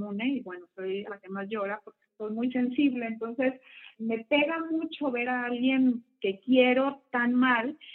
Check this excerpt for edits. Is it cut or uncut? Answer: cut